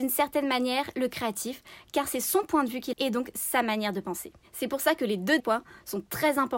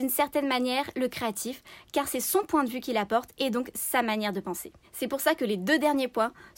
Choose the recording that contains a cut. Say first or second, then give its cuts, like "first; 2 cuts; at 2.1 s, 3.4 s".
first; 2 cuts; at 2.9 s, 5.4 s